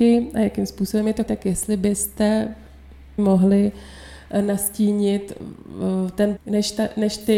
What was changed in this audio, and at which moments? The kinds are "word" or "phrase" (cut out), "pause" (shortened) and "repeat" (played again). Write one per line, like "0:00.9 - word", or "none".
0:01.3 - word
0:03.2 - word
0:06.4 - word